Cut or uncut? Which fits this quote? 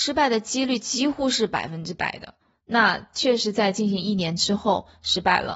cut